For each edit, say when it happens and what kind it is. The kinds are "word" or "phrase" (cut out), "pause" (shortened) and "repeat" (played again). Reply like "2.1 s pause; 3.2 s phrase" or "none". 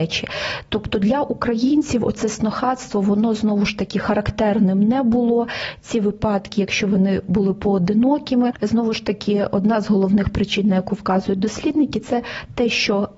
none